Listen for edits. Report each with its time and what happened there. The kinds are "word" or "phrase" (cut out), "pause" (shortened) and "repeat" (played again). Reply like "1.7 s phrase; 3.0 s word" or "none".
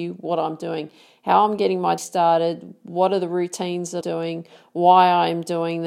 2.0 s word; 4.0 s word

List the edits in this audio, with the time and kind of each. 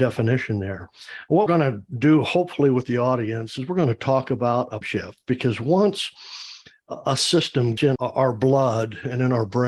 1.5 s word; 4.8 s word; 7.8 s word

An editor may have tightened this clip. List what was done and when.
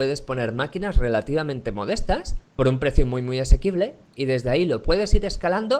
2.4 s pause

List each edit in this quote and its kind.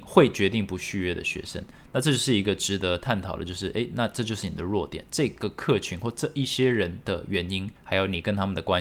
7.8 s pause

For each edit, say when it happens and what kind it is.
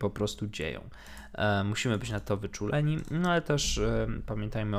none

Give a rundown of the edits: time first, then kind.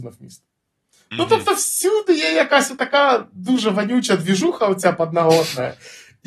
none

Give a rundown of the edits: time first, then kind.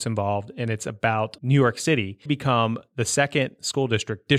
1.4 s word; 2.3 s phrase

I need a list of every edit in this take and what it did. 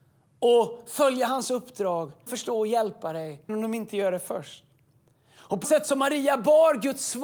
2.3 s word; 3.5 s word; 5.6 s word

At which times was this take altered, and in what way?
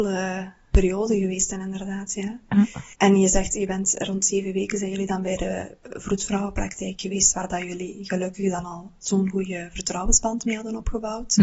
2.9 s pause

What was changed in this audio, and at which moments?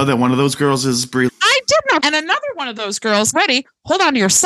1.3 s word; 2.0 s word; 3.3 s word

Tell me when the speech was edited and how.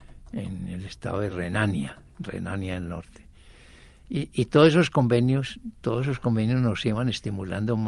none

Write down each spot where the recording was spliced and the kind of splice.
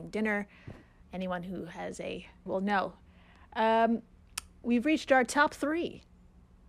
1.0 s word; 2.5 s word

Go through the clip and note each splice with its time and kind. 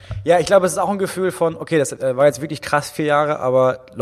none

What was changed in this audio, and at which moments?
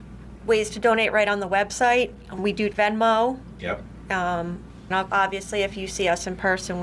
2.4 s word; 2.7 s phrase; 4.9 s word

